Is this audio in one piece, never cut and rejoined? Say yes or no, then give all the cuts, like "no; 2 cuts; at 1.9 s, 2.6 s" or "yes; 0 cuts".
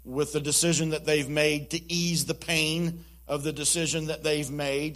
yes; 0 cuts